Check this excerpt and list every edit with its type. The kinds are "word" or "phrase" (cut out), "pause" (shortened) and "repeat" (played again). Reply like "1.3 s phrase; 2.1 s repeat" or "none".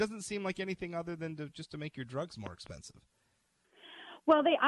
none

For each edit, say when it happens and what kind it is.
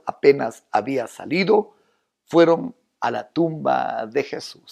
none

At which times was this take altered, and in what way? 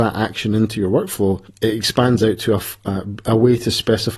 1.5 s pause

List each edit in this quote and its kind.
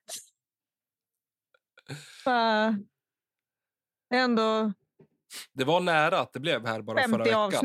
none

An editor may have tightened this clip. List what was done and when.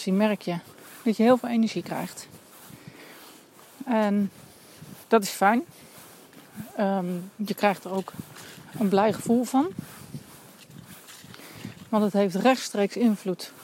5.0 s pause

